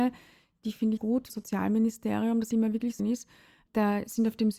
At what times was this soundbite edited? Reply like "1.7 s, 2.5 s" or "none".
1.0 s, 1.3 s, 2.5 s, 3.0 s